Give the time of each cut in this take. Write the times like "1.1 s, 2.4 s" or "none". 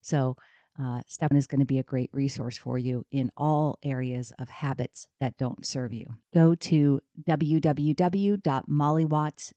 1.3 s, 6.2 s